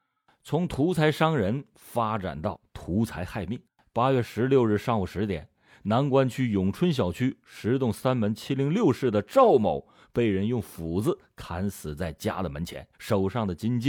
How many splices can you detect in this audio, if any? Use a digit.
2